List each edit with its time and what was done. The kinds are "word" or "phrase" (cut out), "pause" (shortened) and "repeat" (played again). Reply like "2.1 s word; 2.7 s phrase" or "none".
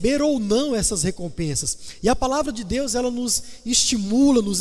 none